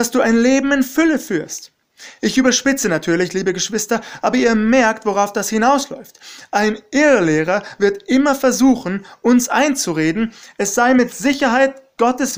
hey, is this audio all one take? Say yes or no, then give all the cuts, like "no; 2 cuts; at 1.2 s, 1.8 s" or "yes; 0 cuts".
yes; 0 cuts